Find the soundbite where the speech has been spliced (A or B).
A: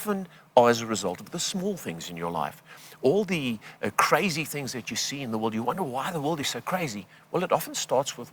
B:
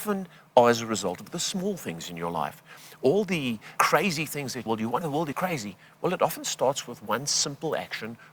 B